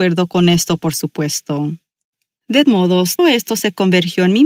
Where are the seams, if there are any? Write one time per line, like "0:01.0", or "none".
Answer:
0:02.6
0:03.2